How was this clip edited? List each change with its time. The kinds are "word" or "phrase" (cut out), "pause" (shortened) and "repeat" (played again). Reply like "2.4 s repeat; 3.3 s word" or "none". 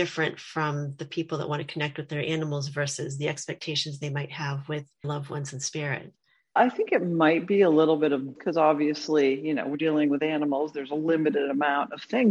5.0 s word; 6.6 s word; 8.4 s word; 9.7 s word